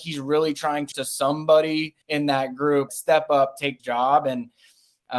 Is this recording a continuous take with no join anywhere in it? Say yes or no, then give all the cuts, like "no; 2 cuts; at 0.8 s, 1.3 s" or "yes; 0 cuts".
no; 4 cuts; at 0.9 s, 2.0 s, 2.9 s, 3.8 s